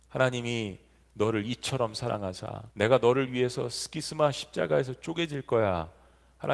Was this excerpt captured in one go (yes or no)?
no